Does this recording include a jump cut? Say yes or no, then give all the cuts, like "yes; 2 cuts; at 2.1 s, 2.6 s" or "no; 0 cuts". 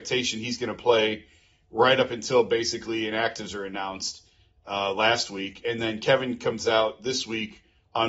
no; 0 cuts